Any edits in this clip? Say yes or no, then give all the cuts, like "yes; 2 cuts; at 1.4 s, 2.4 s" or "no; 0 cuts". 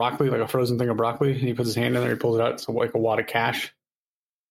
no; 0 cuts